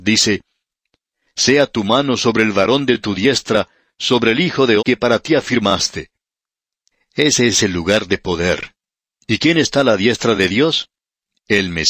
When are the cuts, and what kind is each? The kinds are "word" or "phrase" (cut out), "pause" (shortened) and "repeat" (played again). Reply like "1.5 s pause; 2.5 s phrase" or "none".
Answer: 4.8 s word